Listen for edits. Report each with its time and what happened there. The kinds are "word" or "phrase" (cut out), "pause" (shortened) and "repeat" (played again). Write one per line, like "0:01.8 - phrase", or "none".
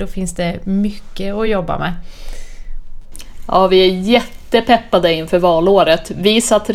none